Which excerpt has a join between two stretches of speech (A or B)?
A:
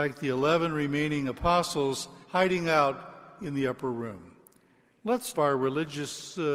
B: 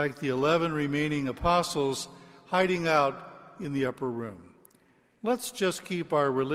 A